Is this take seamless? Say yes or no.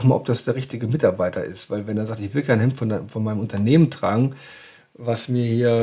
yes